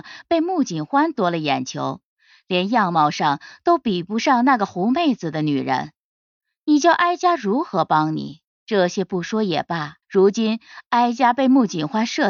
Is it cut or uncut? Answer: cut